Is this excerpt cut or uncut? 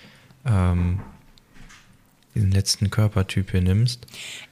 uncut